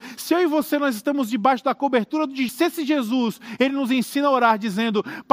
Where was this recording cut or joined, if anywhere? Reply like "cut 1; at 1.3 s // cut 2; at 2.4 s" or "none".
cut 1; at 2.5 s